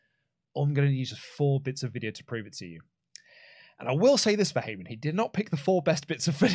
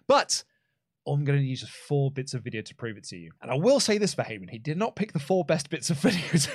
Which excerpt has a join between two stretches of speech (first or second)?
second